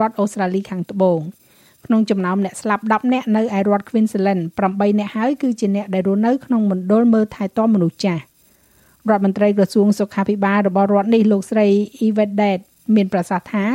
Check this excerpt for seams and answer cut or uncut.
uncut